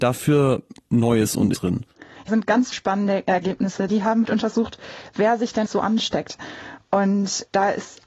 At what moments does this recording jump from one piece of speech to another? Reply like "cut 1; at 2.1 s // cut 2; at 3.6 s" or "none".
cut 1; at 1.5 s // cut 2; at 2.3 s // cut 3; at 2.7 s // cut 4; at 3.9 s // cut 5; at 4.2 s // cut 6; at 5.7 s